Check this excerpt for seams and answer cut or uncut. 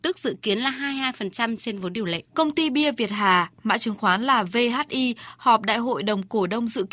cut